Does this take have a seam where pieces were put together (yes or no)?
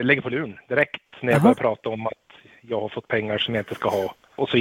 no